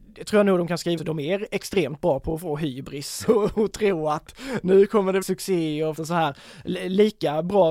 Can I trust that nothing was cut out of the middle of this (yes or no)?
no